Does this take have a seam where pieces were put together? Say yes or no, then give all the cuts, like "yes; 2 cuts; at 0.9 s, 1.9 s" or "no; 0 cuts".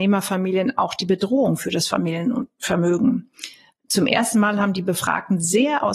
no; 0 cuts